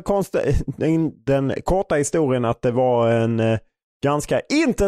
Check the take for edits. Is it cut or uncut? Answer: uncut